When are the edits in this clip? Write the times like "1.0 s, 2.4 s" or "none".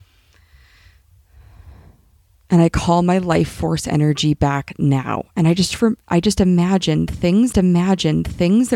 7.5 s